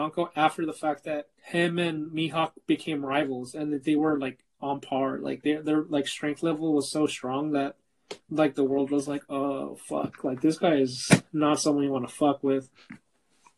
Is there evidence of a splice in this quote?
yes; 3 cuts; at 1.3 s, 8.2 s, 11.3 s

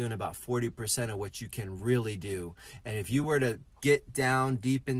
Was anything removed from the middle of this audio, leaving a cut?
no; 0 cuts

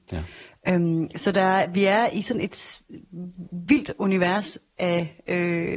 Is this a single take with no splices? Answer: yes; 0 cuts

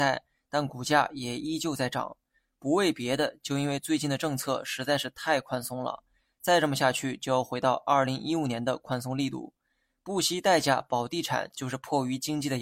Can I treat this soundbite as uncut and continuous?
yes; 0 cuts

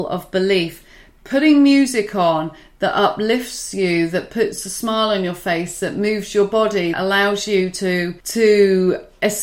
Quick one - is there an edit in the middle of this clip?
yes; 2 cuts; at 6.9 s, 8.2 s

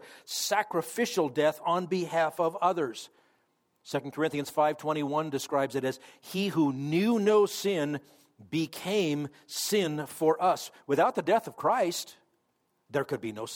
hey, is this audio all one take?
yes; 0 cuts

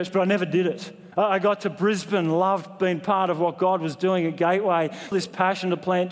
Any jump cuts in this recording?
yes; 2 cuts; at 1.1 s, 5.1 s

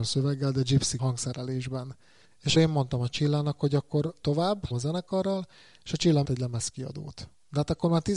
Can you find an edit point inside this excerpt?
yes; 5 cuts; at 1.0 s, 2.5 s, 4.2 s, 4.7 s, 6.2 s

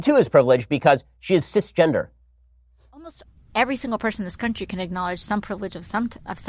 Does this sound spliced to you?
no; 0 cuts

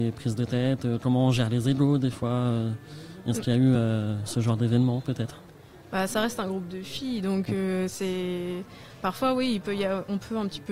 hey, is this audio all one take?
yes; 0 cuts

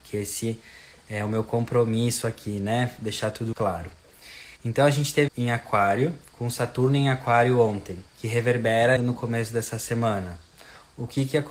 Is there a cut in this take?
yes; 5 cuts; at 3.5 s, 4.6 s, 5.3 s, 8.1 s, 9.0 s

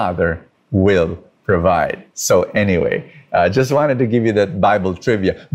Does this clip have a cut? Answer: yes; 1 cut; at 2.1 s

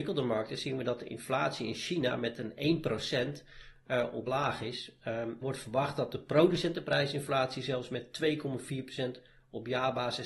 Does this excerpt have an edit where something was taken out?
yes; 2 cuts; at 4.3 s, 5.4 s

